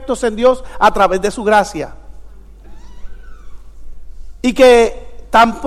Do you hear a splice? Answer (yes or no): no